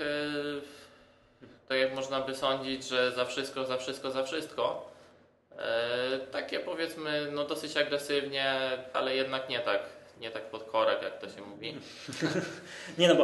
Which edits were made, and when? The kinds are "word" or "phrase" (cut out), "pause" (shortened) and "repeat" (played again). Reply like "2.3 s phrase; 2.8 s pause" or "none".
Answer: 8.9 s word